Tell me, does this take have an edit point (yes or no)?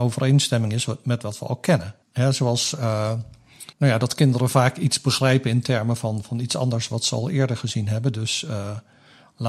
yes